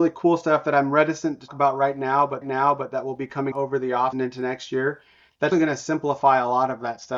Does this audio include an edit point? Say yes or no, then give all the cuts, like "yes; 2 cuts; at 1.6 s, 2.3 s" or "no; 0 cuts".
yes; 5 cuts; at 1.5 s, 2.4 s, 3.5 s, 4.1 s, 5.5 s